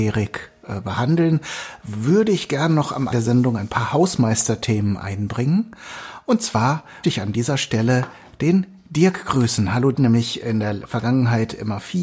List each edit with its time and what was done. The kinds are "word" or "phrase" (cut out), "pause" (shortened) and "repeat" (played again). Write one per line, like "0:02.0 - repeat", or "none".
0:03.1 - word
0:07.0 - word
0:09.9 - phrase